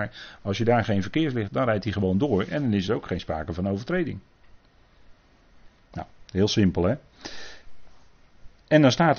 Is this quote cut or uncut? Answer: cut